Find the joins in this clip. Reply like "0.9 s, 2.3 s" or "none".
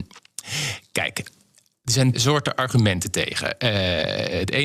2.1 s